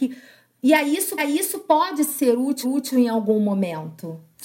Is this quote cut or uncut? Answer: cut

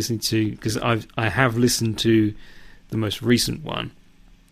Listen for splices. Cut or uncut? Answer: uncut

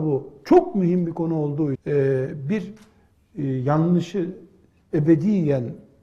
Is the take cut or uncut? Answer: cut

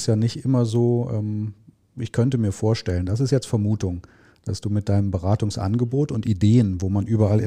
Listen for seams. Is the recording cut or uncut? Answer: uncut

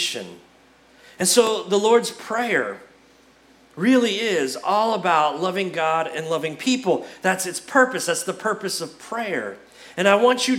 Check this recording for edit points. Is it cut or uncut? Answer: uncut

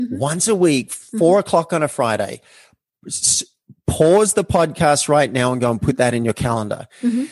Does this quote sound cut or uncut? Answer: uncut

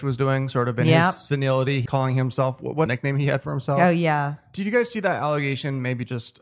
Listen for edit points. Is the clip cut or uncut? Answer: cut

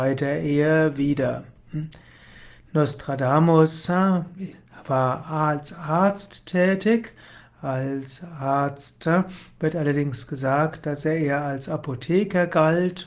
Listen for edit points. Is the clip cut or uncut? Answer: uncut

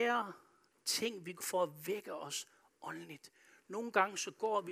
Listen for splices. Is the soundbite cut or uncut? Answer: cut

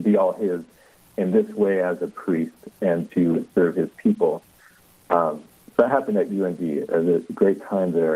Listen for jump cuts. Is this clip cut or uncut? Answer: uncut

